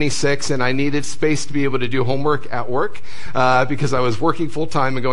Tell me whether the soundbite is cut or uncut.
uncut